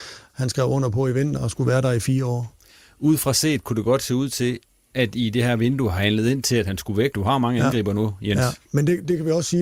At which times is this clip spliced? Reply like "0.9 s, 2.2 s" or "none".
1.4 s, 7.1 s